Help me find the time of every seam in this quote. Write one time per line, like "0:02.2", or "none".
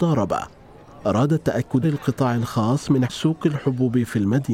0:01.8
0:03.0